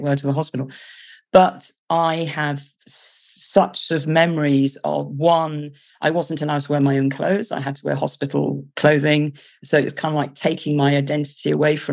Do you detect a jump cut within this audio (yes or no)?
no